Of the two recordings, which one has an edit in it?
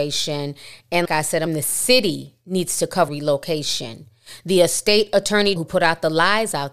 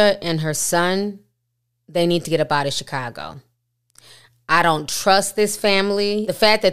first; 4 cuts; at 1.0 s, 1.5 s, 3.1 s, 5.6 s

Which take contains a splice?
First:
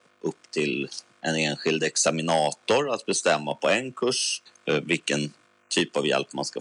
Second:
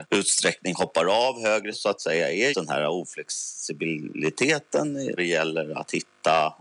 second; 3 cuts; at 1.7 s, 2.5 s, 5.2 s

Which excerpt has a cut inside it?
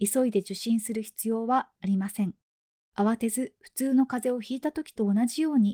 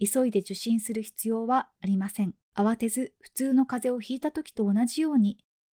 second; 1 cut; at 2.5 s

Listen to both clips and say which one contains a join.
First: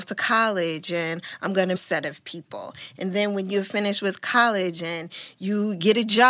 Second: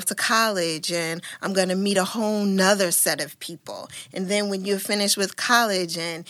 first; 1 cut; at 1.7 s

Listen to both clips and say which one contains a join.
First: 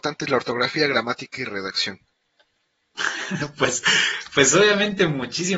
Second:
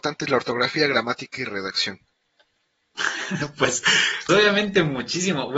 second; 1 cut; at 4.3 s

